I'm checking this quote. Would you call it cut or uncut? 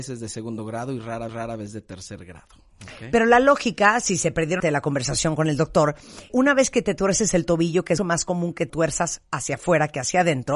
cut